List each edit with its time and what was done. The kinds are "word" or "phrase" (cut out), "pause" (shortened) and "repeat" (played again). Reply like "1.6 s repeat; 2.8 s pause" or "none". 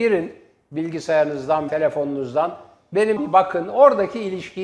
1.7 s word; 3.2 s word